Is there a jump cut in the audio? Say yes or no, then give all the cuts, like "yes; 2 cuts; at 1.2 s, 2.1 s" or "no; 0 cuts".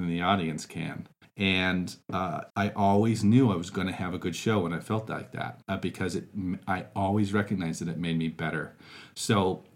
yes; 3 cuts; at 1.2 s, 2.5 s, 5.6 s